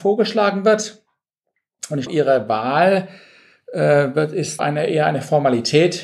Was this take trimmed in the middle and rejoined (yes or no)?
yes